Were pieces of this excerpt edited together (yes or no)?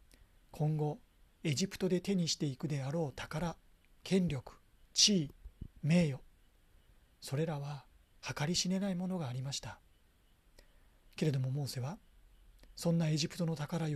no